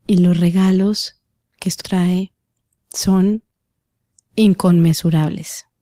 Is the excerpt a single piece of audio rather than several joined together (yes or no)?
no